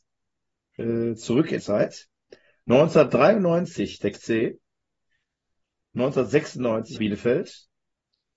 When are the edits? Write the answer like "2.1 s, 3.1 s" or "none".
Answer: 1.6 s, 4.1 s, 7.0 s